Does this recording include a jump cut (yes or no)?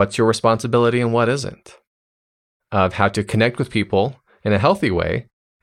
no